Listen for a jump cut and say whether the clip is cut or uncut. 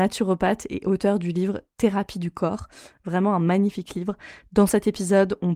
uncut